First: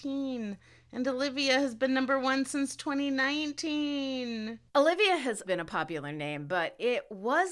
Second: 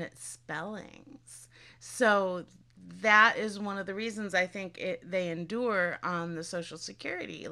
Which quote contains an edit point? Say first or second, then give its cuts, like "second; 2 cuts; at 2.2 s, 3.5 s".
first; 2 cuts; at 4.7 s, 5.4 s